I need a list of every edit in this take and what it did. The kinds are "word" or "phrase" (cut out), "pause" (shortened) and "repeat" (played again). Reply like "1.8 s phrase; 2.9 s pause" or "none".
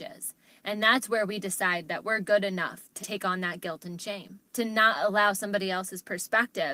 3.0 s word; 4.5 s pause

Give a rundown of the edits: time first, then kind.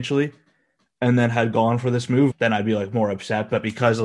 2.3 s word

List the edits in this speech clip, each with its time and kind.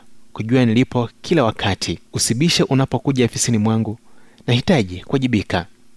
2.1 s pause

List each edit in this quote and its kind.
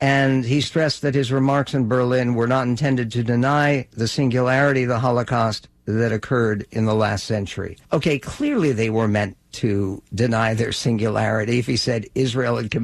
7.8 s pause

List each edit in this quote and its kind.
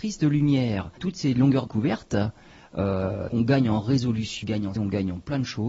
1.0 s word; 1.7 s word; 3.3 s word; 4.4 s word; 4.8 s word

